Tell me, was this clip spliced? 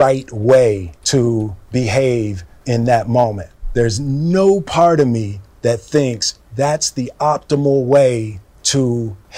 yes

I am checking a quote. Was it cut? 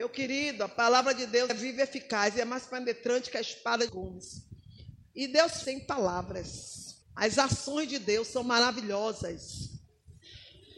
yes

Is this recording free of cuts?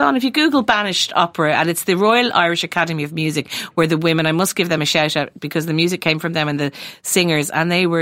yes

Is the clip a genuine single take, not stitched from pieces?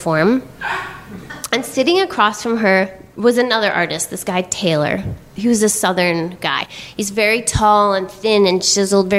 yes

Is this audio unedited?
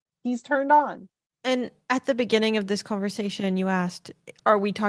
yes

